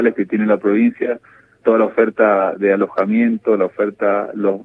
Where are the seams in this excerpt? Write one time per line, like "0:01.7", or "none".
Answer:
0:01.6